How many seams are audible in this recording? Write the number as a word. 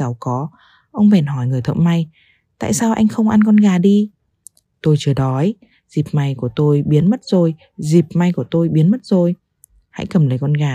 zero